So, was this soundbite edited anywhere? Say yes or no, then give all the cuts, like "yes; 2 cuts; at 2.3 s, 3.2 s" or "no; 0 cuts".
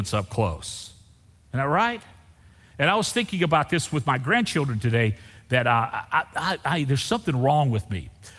no; 0 cuts